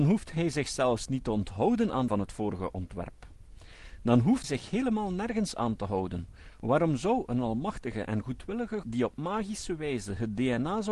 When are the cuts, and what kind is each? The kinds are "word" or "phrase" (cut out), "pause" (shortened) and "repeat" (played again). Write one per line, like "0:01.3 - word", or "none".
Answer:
0:02.1 - phrase
0:04.4 - word
0:08.8 - phrase